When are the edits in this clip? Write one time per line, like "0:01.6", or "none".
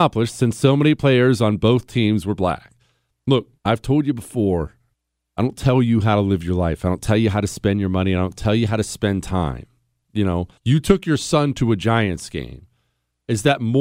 0:03.6
0:04.9
0:10.6